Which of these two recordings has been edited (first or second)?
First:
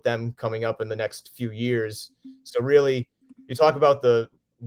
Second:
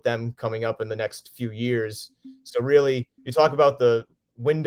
second